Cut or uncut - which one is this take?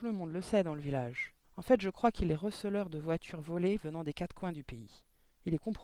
cut